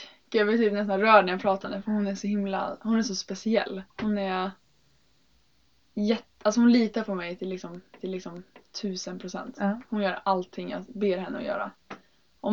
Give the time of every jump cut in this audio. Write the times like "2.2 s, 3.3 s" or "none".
1.6 s, 3.9 s, 8.0 s

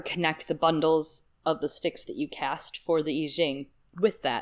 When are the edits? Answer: none

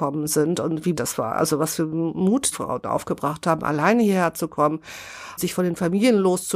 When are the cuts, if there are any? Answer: 0.9 s, 2.5 s, 5.4 s

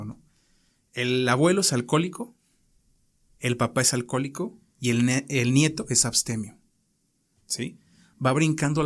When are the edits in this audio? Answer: none

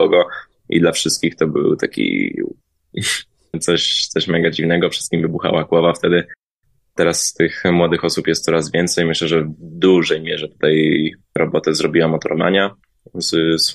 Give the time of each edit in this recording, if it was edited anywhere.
none

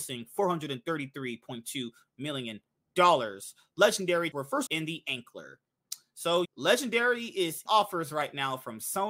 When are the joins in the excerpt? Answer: 4.3 s, 4.7 s, 6.4 s, 7.7 s

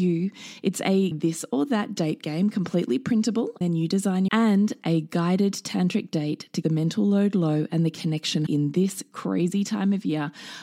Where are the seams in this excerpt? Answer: 1.1 s, 3.6 s, 4.3 s, 6.6 s, 8.5 s

